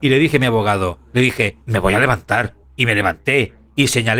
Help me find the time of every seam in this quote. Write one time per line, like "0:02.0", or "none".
0:01.6
0:02.6